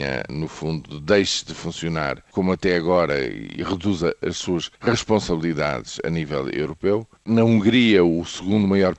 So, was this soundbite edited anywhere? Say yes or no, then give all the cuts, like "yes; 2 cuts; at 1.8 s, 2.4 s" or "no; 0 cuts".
yes; 3 cuts; at 2.3 s, 4.8 s, 7.2 s